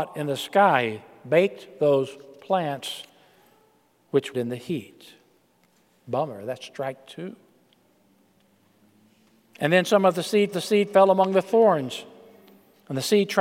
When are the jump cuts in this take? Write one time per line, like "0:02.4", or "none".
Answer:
0:04.3
0:10.5